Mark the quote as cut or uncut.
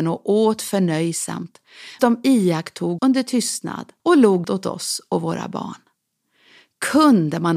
cut